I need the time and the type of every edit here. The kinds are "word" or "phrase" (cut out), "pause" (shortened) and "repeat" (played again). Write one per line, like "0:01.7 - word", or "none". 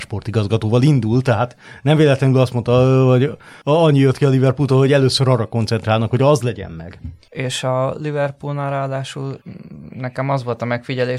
none